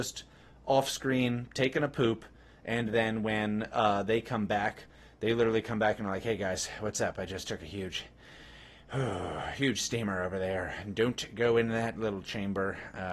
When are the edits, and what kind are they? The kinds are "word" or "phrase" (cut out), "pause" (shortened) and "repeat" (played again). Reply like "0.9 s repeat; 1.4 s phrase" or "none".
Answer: none